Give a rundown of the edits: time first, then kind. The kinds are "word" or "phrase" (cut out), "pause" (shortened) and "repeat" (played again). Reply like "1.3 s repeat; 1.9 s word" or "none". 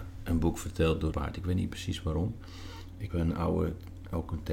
1.1 s word; 3.1 s word